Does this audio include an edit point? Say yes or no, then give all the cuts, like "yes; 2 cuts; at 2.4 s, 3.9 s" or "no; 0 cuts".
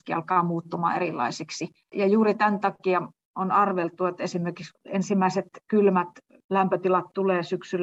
yes; 1 cut; at 4.7 s